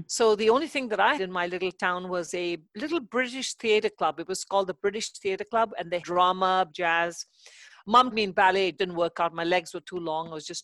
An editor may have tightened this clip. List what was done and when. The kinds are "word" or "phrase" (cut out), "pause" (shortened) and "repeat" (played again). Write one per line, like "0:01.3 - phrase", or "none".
0:01.2 - word
0:02.7 - word
0:06.0 - word
0:06.7 - word
0:08.1 - word
0:08.8 - word